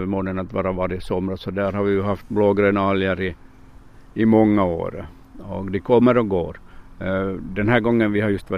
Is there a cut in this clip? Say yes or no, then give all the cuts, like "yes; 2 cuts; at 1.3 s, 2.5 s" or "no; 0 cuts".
no; 0 cuts